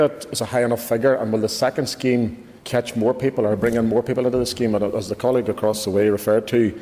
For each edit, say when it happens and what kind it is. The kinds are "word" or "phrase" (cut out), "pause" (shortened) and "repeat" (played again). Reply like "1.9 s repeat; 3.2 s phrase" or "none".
2.6 s pause